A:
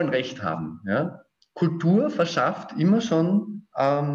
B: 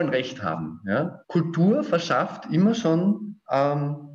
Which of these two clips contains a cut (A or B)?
B